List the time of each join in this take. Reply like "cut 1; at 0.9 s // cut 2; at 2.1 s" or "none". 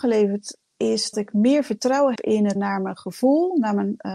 cut 1; at 1.1 s // cut 2; at 2.2 s // cut 3; at 2.6 s